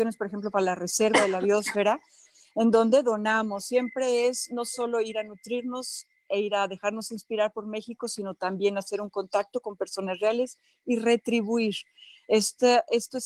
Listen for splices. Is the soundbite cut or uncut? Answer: uncut